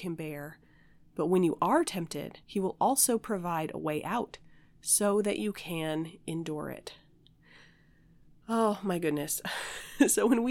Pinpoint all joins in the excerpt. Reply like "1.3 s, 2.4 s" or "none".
2.4 s